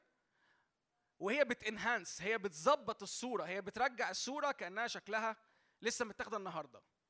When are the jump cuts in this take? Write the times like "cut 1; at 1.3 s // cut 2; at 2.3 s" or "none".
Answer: none